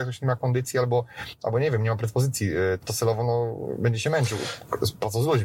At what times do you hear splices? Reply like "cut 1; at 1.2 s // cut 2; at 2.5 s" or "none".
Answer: cut 1; at 2.8 s

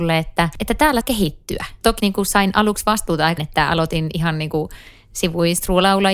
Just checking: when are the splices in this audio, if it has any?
cut 1; at 1.0 s // cut 2; at 2.0 s // cut 3; at 3.4 s

